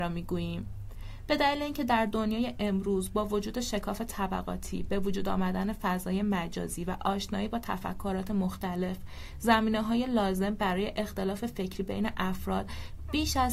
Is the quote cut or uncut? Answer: uncut